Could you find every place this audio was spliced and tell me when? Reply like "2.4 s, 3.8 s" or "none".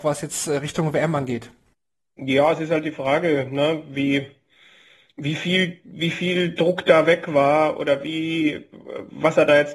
none